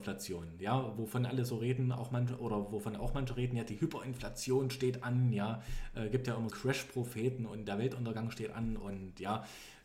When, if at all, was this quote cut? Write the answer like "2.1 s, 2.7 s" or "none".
6.5 s